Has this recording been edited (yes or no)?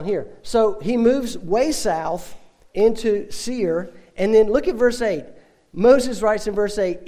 no